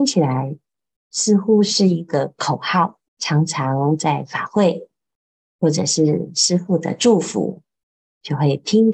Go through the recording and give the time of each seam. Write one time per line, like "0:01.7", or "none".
0:03.1